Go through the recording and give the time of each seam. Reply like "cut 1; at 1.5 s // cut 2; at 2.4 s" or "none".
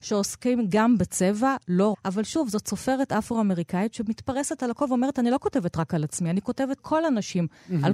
cut 1; at 1.9 s // cut 2; at 6.8 s

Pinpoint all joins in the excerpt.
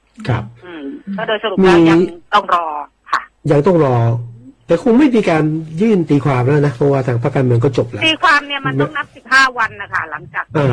cut 1; at 2.3 s

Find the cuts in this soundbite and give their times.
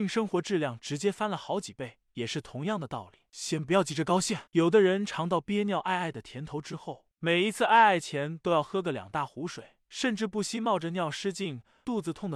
cut 1; at 4.5 s

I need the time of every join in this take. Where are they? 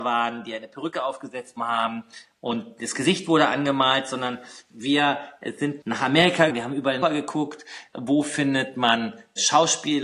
cut 1; at 1.6 s // cut 2; at 6.5 s // cut 3; at 7.0 s

